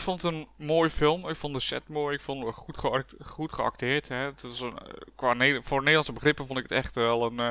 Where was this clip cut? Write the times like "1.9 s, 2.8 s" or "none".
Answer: none